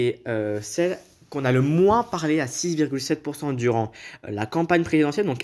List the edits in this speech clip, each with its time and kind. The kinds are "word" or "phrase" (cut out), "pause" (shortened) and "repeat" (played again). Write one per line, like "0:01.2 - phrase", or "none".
none